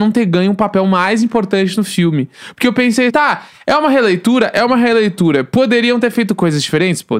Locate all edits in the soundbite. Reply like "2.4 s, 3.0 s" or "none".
3.1 s